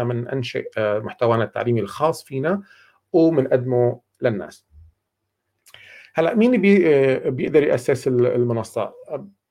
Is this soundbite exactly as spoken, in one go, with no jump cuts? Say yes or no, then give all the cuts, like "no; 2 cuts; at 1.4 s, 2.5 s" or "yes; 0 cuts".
yes; 0 cuts